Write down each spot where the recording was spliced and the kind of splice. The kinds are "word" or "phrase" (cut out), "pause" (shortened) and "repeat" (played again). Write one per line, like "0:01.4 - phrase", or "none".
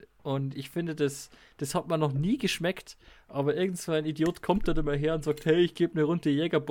none